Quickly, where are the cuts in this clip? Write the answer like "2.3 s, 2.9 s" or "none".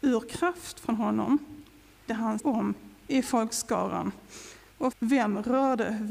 2.1 s, 2.4 s, 4.9 s

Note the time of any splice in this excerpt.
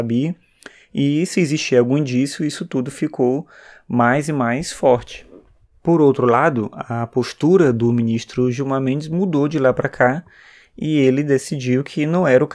none

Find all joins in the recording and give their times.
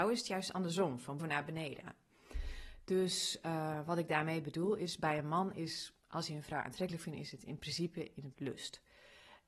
1.2 s, 8.3 s

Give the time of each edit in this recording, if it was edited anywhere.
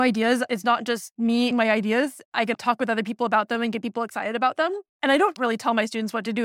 1.5 s, 2.5 s, 4.9 s

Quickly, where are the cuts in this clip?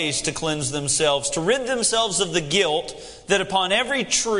none

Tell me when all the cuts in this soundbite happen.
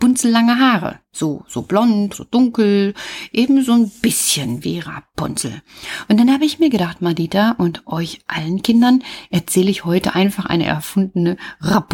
2.1 s

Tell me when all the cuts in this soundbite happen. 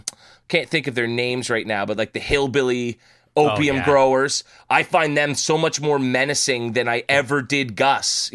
none

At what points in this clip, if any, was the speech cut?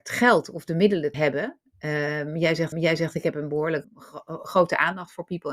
1.1 s, 2.7 s, 3.8 s

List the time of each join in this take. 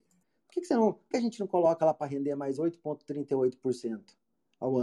1.1 s

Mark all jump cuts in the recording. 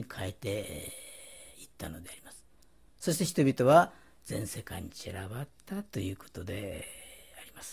none

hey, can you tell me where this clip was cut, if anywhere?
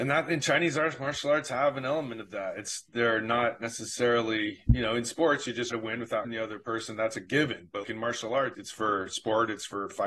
5.7 s, 6.2 s, 7.8 s, 8.5 s

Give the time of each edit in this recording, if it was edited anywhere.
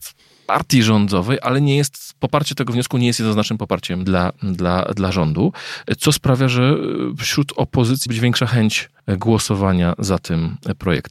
4.0 s, 8.1 s, 9.0 s

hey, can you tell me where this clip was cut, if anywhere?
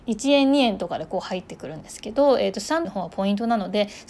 2.8 s

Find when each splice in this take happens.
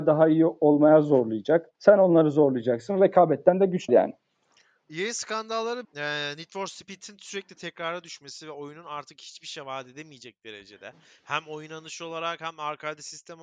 1.7 s, 3.9 s, 5.8 s

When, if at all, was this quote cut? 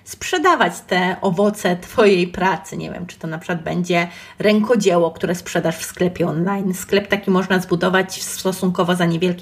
none

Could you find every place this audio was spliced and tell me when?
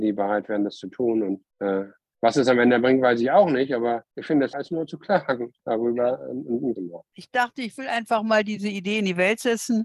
1.5 s, 4.1 s, 4.5 s, 5.6 s, 6.8 s

